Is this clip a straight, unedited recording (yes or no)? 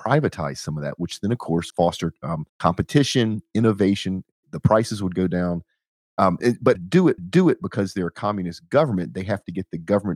no